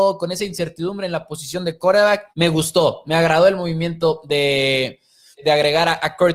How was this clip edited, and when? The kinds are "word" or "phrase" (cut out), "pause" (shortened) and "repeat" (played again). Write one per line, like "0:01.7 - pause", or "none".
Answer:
0:02.3 - pause
0:05.4 - word